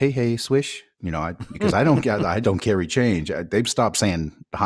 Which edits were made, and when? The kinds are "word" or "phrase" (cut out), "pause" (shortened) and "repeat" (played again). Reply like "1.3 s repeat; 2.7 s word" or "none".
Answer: 0.9 s pause; 1.5 s phrase; 2.4 s word

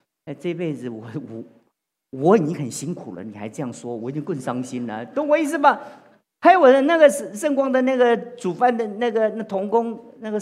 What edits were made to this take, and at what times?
none

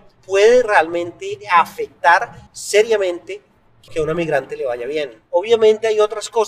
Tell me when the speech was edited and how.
2.5 s pause; 3.9 s word

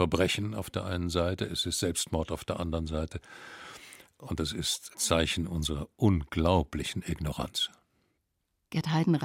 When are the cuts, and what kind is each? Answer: none

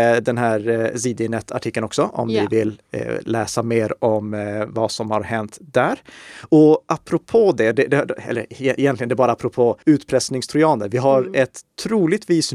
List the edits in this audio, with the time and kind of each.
9.8 s pause

